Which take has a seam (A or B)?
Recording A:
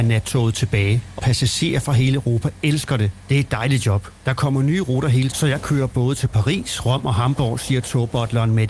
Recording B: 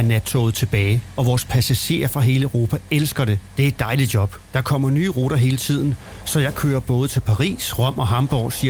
A